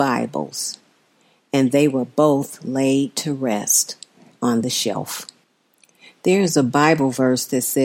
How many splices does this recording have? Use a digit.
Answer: 0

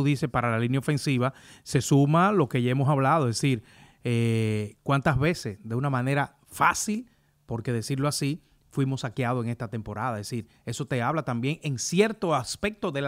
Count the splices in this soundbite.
0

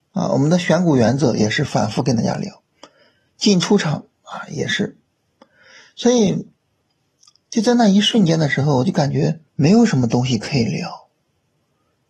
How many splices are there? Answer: 1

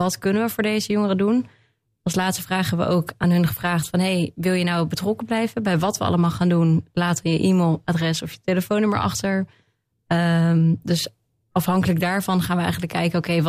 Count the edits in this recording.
0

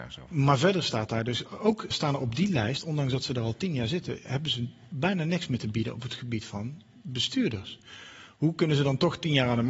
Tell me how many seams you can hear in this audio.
1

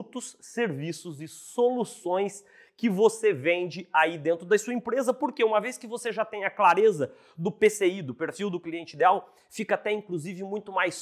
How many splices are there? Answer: 0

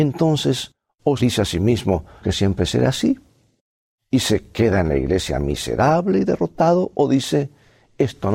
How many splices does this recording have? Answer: 2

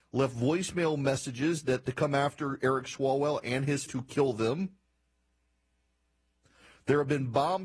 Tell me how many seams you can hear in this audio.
2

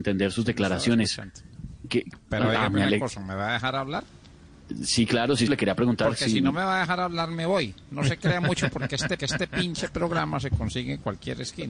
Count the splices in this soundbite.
2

